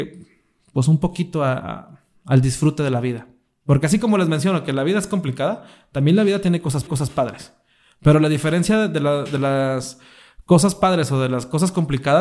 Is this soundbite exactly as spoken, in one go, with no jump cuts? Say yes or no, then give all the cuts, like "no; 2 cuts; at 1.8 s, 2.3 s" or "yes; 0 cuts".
no; 1 cut; at 6.9 s